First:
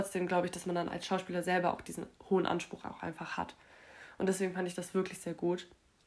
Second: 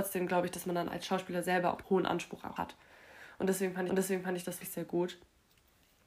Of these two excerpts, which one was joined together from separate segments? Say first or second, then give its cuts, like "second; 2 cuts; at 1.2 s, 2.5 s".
second; 4 cuts; at 1.8 s, 2.6 s, 3.9 s, 4.6 s